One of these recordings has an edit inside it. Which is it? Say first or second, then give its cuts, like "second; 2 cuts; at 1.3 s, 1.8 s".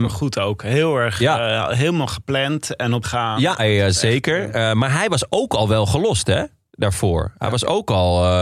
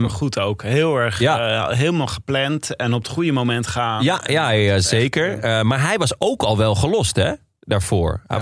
first; 2 cuts; at 3.0 s, 3.6 s